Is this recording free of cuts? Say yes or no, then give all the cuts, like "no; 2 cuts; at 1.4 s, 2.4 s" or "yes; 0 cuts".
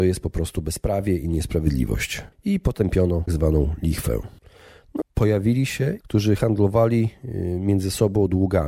no; 3 cuts; at 3.3 s, 5.0 s, 6.0 s